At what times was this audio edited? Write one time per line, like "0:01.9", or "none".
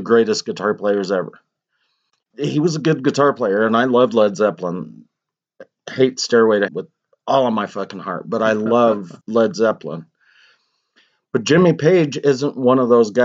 0:02.3
0:06.7
0:09.2